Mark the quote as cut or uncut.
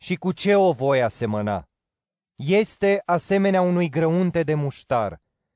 uncut